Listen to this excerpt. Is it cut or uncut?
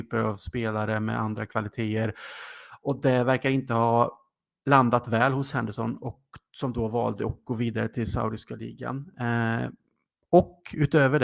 uncut